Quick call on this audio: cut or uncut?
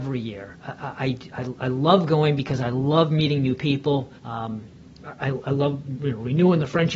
cut